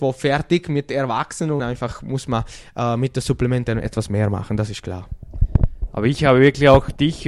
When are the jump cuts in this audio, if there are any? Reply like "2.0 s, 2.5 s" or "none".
1.6 s